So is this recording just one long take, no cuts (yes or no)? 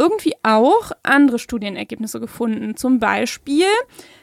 yes